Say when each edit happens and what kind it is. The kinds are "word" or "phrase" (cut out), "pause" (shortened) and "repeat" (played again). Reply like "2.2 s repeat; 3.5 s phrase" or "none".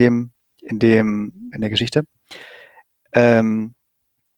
1.5 s word